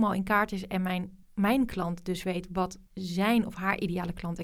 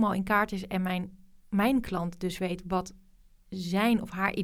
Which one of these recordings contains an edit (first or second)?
first